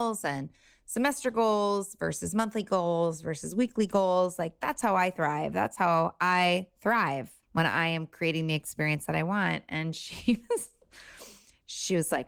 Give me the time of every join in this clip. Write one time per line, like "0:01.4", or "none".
0:07.4